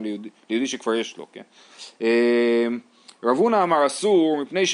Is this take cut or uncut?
uncut